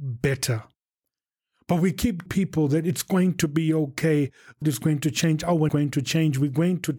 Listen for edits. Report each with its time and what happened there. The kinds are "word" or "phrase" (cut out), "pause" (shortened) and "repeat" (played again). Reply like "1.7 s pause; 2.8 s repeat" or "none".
2.3 s word; 4.6 s word; 5.7 s word